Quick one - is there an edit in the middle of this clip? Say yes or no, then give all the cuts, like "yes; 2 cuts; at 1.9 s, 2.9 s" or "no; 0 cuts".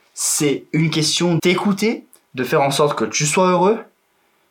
yes; 1 cut; at 1.4 s